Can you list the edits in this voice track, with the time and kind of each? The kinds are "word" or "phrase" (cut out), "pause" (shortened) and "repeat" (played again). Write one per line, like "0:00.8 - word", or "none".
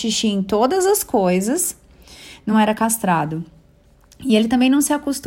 none